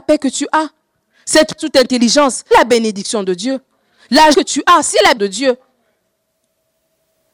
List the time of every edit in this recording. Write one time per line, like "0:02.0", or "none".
0:01.6
0:02.5
0:04.3
0:05.2